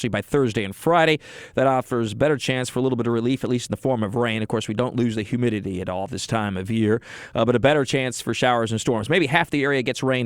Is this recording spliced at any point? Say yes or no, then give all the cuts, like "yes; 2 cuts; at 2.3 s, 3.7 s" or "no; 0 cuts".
no; 0 cuts